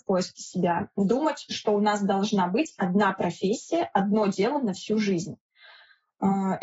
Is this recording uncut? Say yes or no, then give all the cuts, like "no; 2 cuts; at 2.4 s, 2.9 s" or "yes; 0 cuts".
yes; 0 cuts